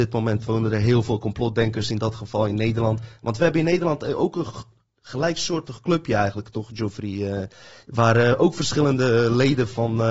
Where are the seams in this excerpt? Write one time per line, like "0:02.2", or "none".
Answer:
none